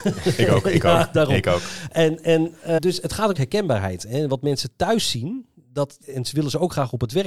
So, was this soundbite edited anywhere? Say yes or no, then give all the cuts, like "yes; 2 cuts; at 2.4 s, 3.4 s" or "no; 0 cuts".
yes; 3 cuts; at 2.8 s, 3.3 s, 6.0 s